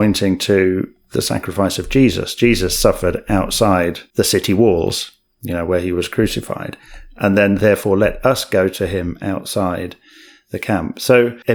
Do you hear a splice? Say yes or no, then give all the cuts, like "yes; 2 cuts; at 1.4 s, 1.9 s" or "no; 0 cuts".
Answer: no; 0 cuts